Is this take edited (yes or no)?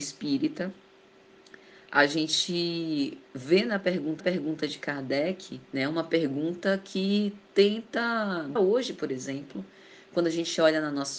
yes